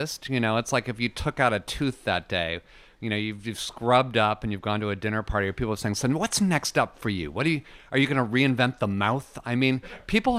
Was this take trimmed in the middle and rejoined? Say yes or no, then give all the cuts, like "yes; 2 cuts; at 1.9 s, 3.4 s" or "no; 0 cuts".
no; 0 cuts